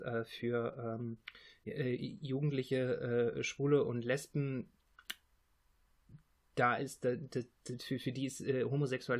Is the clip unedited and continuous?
yes; 0 cuts

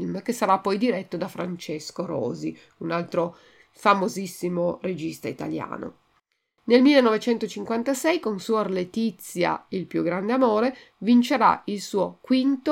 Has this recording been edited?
no; 0 cuts

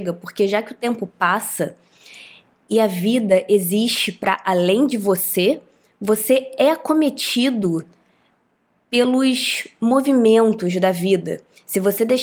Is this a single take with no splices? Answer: yes; 0 cuts

